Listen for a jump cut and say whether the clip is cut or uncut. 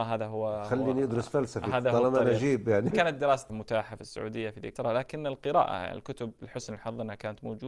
cut